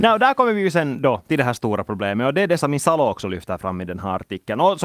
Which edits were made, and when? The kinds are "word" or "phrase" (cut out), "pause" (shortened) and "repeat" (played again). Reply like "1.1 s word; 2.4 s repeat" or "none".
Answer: 2.6 s word